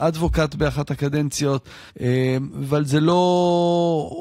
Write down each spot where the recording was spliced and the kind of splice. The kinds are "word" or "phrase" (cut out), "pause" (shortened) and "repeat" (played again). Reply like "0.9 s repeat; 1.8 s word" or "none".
1.9 s pause